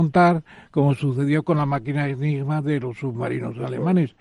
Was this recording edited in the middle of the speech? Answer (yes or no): no